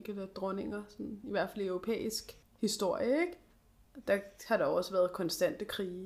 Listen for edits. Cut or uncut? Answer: uncut